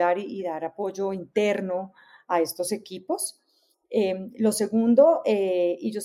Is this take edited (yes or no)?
no